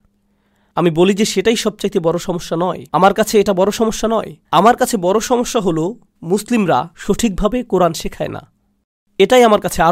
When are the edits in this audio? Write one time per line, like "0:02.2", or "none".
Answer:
0:02.9
0:04.5
0:06.9